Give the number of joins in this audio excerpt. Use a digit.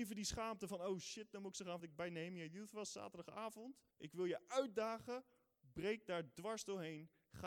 2